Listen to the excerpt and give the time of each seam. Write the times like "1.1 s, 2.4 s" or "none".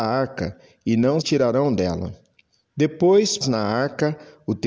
1.2 s, 3.4 s

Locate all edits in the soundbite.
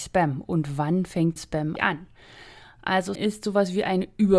1.4 s, 1.8 s, 3.1 s

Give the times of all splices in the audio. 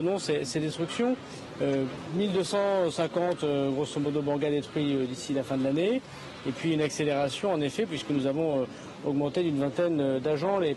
none

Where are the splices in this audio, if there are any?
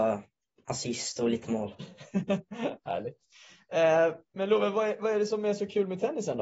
none

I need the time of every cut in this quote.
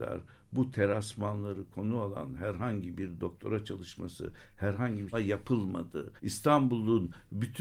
5.1 s, 6.2 s

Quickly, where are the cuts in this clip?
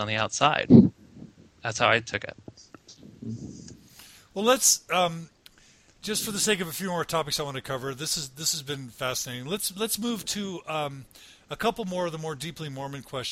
none

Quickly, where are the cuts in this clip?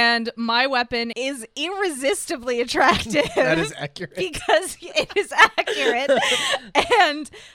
1.1 s

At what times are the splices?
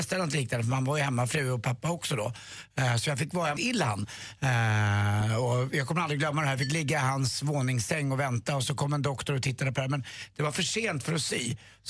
3.6 s

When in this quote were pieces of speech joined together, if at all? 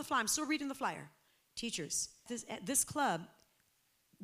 2.3 s

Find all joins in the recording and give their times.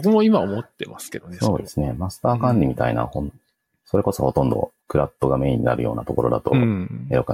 4.8 s

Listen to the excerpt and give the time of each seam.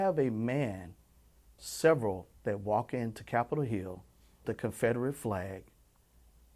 1.6 s, 2.4 s, 4.4 s

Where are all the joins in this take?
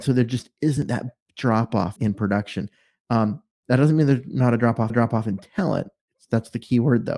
2.0 s, 4.9 s

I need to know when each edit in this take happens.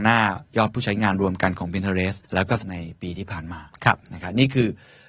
2.2 s, 2.6 s

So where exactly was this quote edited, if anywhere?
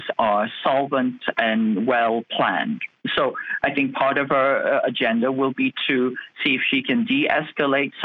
none

